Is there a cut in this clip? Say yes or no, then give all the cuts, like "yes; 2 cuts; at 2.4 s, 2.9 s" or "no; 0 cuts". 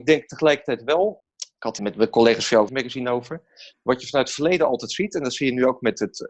yes; 3 cuts; at 1.2 s, 1.8 s, 2.7 s